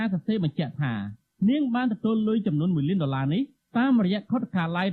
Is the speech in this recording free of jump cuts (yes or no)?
yes